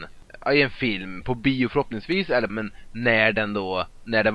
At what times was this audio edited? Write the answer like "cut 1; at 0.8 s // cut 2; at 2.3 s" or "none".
cut 1; at 2.5 s